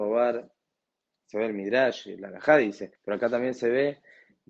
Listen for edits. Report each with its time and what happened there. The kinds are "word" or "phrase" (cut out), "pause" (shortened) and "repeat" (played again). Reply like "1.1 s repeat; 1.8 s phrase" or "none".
2.9 s pause